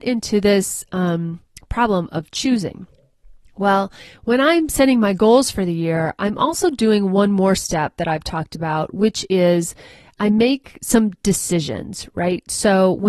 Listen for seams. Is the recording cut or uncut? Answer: uncut